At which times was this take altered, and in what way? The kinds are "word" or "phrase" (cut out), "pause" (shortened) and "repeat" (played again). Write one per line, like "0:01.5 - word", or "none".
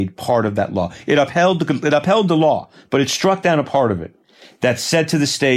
none